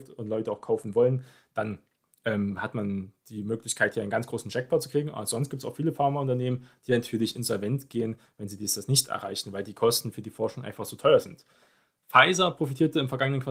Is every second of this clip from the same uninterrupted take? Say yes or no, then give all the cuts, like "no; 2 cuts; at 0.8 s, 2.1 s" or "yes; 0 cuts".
yes; 0 cuts